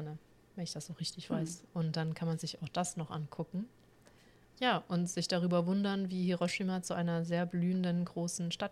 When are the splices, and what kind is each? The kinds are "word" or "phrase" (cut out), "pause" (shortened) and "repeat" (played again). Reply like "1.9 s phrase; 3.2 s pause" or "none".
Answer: none